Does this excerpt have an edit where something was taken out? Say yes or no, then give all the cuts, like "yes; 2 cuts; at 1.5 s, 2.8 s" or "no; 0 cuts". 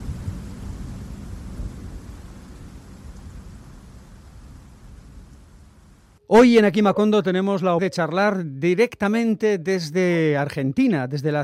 yes; 1 cut; at 7.8 s